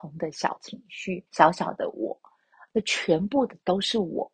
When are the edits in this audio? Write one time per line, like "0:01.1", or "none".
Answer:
0:01.3